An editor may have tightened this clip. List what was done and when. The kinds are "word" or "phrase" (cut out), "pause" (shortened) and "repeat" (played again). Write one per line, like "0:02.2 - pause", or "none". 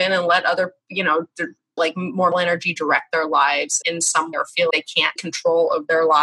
0:01.8 - word
0:02.3 - word
0:03.8 - word
0:04.3 - word
0:04.7 - word
0:05.2 - word